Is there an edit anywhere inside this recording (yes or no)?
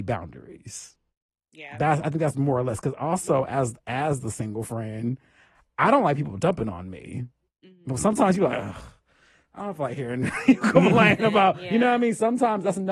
no